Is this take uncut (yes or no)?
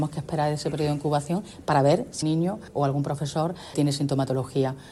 no